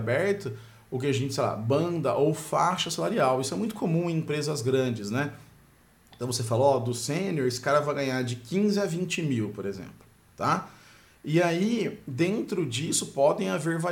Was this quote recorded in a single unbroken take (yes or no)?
yes